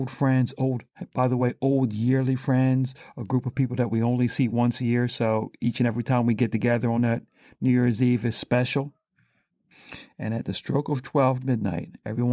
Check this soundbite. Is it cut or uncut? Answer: uncut